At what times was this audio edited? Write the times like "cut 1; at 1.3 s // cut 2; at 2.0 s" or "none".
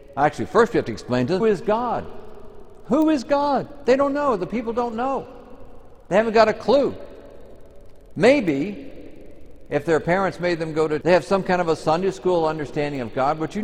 cut 1; at 1.4 s // cut 2; at 11.0 s